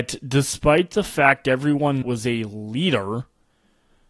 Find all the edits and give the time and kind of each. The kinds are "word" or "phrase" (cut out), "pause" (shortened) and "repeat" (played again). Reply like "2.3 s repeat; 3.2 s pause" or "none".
2.0 s word